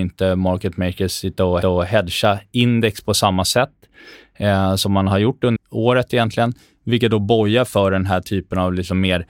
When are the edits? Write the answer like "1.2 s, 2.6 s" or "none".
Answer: 1.6 s, 5.6 s